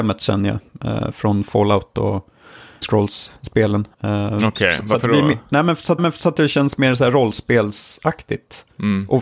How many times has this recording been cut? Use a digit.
3